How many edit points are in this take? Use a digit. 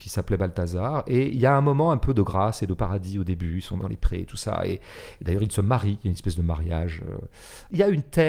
0